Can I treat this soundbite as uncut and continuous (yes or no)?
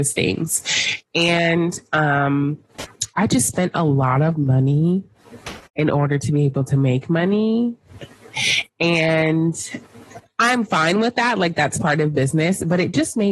no